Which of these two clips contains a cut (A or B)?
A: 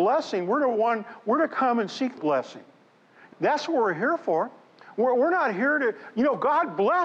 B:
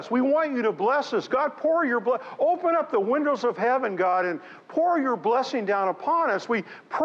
A